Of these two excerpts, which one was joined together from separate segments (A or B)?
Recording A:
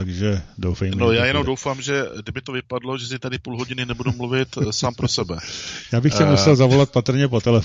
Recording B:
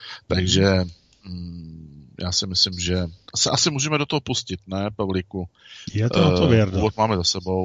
B